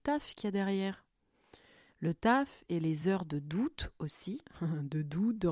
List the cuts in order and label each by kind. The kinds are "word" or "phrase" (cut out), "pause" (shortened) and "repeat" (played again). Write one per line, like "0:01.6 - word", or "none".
none